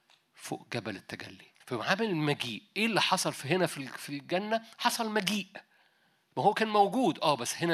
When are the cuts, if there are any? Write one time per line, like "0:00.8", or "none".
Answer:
0:01.6